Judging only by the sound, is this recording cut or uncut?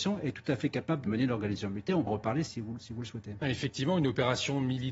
cut